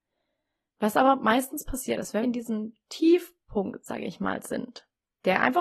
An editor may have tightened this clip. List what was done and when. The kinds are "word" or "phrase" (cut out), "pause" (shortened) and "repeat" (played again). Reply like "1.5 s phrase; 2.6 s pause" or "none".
2.2 s word

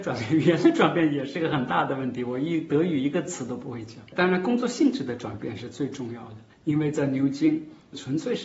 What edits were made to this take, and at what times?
6.5 s pause

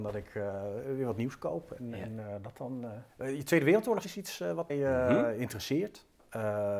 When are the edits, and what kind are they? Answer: 4.7 s word

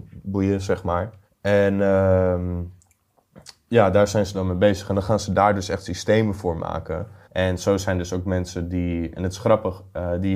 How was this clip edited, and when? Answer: 1.3 s pause; 7.2 s pause

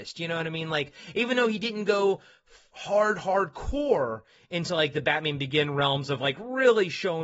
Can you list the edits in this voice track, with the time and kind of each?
none

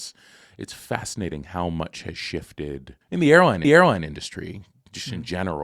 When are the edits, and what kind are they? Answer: 3.0 s pause; 3.6 s repeat

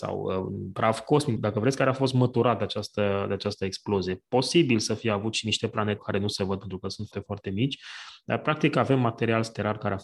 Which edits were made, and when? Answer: 1.4 s word; 6.0 s word; 7.1 s word

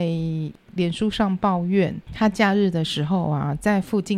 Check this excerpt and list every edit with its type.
2.0 s pause

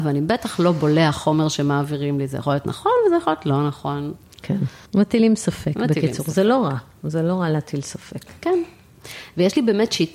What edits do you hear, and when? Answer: 4.9 s pause

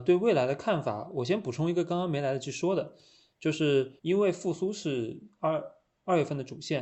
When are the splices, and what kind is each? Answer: 4.0 s word

